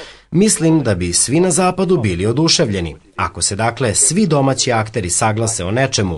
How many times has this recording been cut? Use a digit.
0